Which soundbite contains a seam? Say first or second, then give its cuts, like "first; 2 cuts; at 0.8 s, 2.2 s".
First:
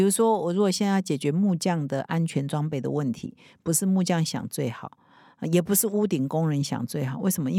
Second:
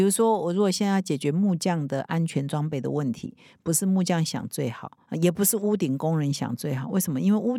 second; 1 cut; at 5.0 s